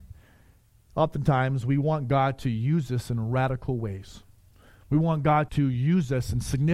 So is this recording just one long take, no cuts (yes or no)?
no